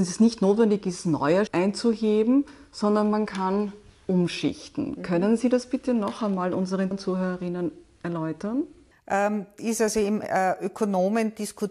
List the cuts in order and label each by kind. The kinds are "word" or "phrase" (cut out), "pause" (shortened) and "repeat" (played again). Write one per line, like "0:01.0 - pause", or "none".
0:01.5 - word
0:06.9 - word
0:09.6 - word
0:10.2 - word